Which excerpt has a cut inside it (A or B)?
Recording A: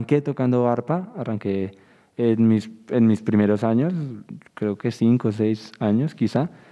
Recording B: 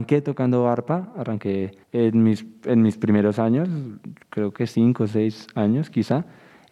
B